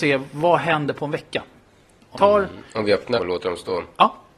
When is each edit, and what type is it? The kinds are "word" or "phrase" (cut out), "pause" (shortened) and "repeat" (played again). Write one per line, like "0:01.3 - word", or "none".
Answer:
0:02.1 - word
0:03.2 - word